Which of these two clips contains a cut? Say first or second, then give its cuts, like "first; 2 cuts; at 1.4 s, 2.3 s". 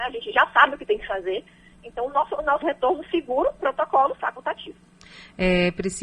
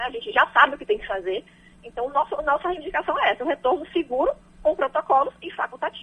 first; 3 cuts; at 2.6 s, 3.6 s, 4.2 s